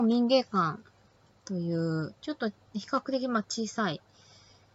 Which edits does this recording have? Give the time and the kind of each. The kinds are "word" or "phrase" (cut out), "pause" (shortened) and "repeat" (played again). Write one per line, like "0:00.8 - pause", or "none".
0:02.2 - pause